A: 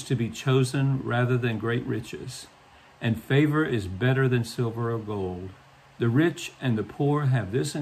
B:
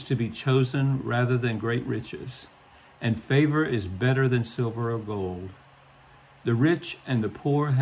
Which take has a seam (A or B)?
A